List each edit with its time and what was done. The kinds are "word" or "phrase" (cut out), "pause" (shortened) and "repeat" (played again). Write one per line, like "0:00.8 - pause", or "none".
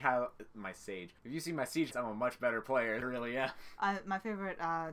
0:01.2 - pause
0:01.9 - word
0:03.0 - phrase